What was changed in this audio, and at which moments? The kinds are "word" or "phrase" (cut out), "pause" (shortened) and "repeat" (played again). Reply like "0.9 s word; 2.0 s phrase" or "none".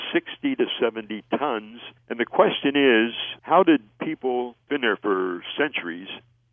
2.0 s pause; 3.4 s pause; 4.7 s word